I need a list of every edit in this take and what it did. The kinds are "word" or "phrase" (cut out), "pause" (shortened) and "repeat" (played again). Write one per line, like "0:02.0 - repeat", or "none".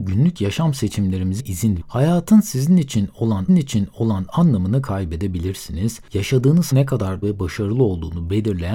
0:01.4 - word
0:01.8 - word
0:03.5 - repeat
0:06.7 - word
0:07.2 - word